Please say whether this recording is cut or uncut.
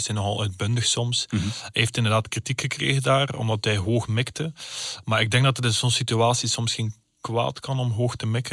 uncut